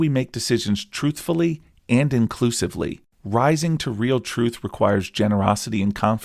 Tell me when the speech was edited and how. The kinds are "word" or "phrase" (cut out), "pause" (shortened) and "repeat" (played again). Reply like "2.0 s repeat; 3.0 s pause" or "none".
none